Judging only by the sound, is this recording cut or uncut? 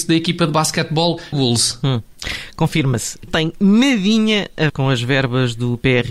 cut